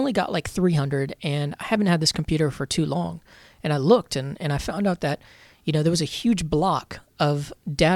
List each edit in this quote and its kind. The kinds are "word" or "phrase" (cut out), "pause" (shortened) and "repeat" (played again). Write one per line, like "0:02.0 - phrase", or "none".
none

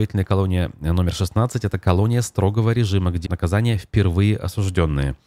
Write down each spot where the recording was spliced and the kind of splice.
0:03.2 - word

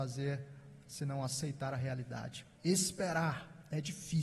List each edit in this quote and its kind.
0:02.5 - pause

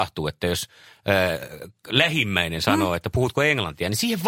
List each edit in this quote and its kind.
none

